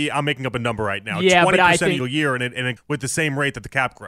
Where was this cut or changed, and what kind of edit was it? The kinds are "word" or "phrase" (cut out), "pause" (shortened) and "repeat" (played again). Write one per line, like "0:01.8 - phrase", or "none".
0:02.0 - phrase
0:02.8 - word